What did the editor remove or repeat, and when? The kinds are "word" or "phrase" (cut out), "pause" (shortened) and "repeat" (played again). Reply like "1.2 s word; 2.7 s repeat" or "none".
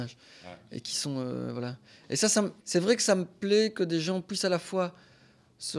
2.6 s pause